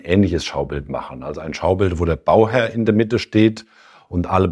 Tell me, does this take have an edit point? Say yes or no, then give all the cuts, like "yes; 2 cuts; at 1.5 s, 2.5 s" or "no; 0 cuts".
no; 0 cuts